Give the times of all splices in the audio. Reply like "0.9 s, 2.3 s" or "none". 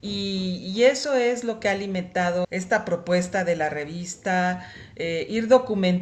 2.4 s